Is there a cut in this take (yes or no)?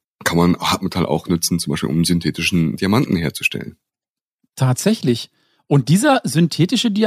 no